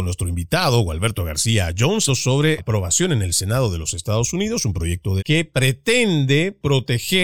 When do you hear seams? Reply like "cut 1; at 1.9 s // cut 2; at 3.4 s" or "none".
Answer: cut 1; at 2.1 s // cut 2; at 2.6 s // cut 3; at 5.2 s